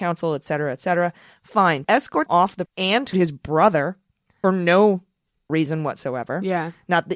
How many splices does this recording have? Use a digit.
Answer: 6